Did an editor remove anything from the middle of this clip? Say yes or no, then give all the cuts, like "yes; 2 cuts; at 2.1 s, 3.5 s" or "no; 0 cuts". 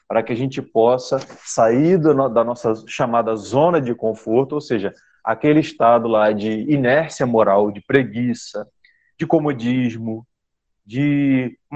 no; 0 cuts